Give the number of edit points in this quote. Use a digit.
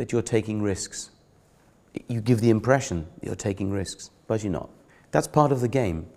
1